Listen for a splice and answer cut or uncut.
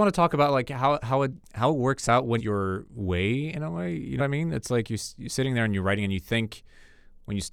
cut